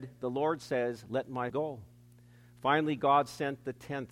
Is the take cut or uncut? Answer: cut